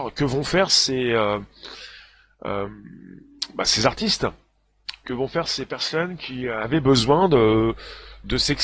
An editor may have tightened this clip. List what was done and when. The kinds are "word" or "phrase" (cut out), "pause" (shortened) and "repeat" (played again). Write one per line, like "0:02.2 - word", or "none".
none